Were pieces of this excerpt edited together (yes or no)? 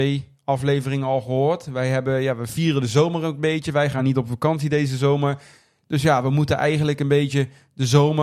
no